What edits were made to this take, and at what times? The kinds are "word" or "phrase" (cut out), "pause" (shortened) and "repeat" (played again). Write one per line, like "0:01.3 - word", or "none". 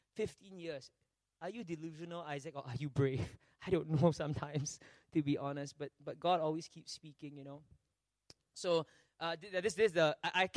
none